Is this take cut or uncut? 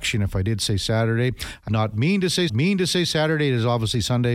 cut